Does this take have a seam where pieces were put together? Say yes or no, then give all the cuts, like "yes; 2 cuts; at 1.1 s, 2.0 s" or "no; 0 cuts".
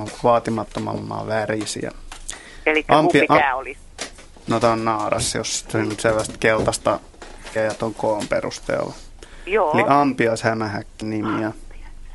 yes; 2 cuts; at 7.6 s, 11.0 s